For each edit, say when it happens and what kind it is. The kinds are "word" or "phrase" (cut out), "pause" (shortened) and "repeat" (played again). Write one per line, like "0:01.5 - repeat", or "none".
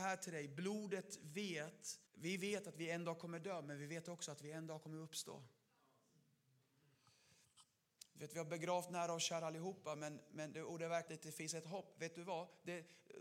0:02.1 - pause
0:11.1 - phrase